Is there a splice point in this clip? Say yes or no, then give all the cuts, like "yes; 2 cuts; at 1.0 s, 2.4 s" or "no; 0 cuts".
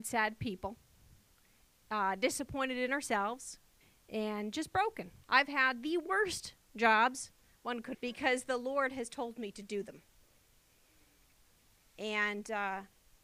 yes; 3 cuts; at 3.8 s, 5.2 s, 7.9 s